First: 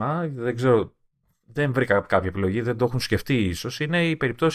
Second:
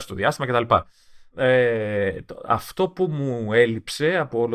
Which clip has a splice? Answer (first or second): second